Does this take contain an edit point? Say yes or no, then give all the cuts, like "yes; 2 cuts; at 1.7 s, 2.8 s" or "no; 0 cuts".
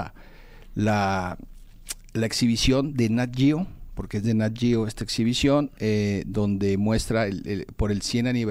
no; 0 cuts